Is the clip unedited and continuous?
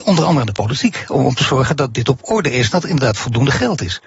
yes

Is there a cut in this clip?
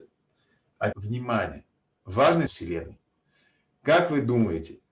yes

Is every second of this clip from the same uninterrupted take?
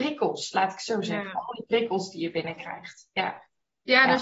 yes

